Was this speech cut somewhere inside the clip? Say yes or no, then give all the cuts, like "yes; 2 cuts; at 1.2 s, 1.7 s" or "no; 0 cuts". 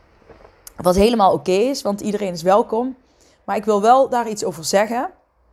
no; 0 cuts